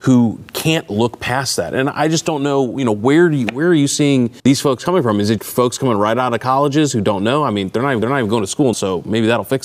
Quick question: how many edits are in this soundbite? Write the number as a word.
four